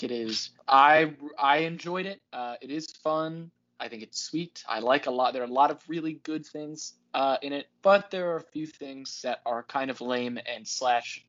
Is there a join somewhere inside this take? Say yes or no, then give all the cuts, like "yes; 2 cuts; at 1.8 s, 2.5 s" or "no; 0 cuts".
yes; 1 cut; at 2.3 s